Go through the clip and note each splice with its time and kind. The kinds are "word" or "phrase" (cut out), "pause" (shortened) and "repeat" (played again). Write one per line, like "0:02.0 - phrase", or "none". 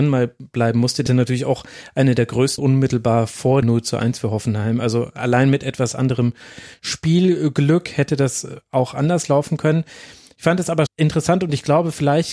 0:01.1 - word
0:02.6 - word
0:03.6 - word
0:10.9 - word